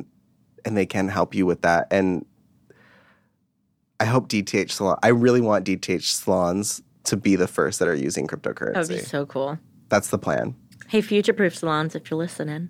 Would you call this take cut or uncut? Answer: uncut